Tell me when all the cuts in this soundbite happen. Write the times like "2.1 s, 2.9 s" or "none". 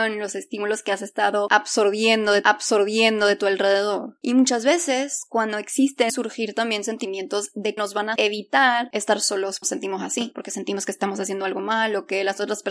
2.4 s, 6.1 s, 7.8 s, 8.1 s, 9.6 s